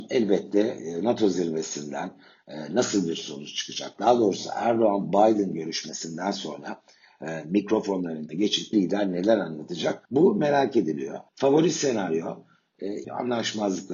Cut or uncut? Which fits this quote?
cut